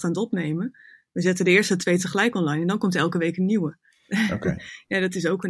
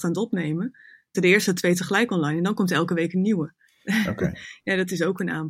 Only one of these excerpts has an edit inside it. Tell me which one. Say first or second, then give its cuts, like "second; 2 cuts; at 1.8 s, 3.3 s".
second; 1 cut; at 1.1 s